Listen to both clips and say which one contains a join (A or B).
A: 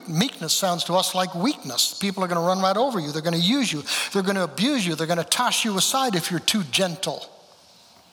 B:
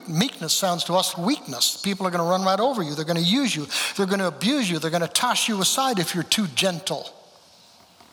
B